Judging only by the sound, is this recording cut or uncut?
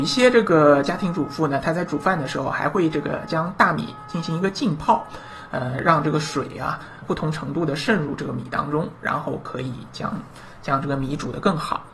cut